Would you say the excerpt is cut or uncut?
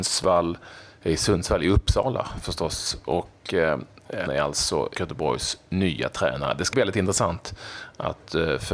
cut